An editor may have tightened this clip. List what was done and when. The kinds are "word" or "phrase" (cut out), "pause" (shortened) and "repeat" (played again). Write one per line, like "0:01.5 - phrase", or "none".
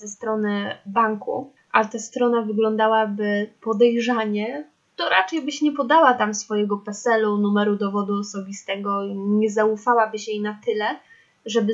0:01.6 - pause